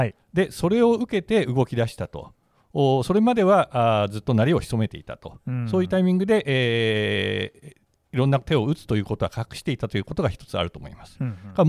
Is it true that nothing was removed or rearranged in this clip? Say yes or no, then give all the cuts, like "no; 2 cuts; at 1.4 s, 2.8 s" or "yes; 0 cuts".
yes; 0 cuts